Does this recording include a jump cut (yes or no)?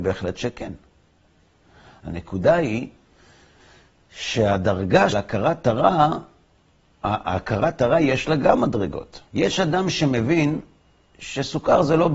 yes